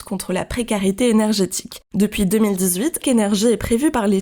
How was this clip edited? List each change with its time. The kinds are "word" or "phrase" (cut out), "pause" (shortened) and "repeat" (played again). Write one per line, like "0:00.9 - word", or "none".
0:03.0 - phrase